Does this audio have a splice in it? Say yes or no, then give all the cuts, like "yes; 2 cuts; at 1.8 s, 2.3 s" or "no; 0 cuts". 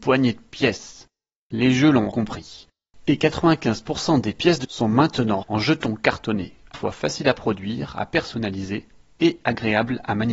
yes; 4 cuts; at 2.1 s, 4.6 s, 5.4 s, 6.7 s